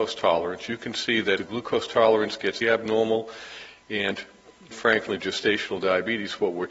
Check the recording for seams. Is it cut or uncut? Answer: cut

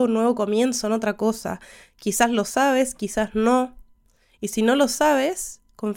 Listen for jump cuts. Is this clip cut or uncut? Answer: uncut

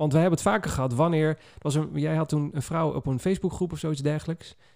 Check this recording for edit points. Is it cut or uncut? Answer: uncut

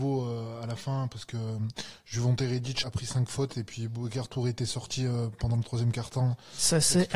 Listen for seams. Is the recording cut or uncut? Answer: cut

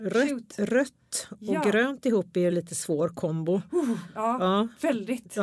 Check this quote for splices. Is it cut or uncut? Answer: uncut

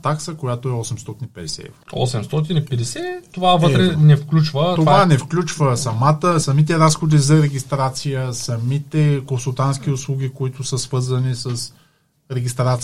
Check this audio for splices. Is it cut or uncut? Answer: uncut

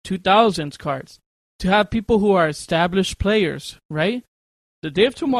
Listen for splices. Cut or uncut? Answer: uncut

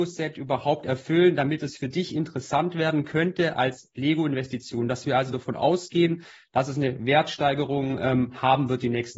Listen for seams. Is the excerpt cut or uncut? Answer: uncut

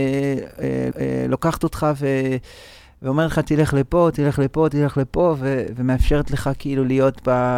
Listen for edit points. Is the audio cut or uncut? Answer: cut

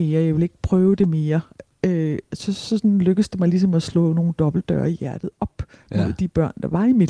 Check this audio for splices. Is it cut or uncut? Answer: uncut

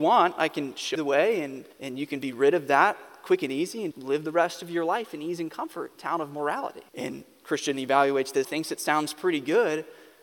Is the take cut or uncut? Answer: cut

